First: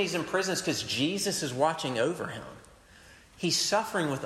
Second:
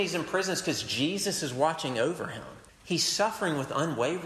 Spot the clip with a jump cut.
second; 1 cut; at 2.7 s

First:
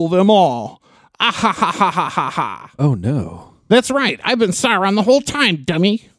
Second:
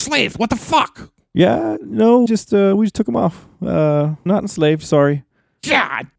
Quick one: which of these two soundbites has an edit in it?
second; 2 cuts; at 2.3 s, 4.3 s

